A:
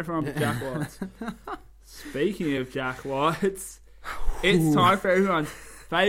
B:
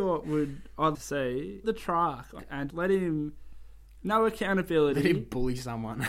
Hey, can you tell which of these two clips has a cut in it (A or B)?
B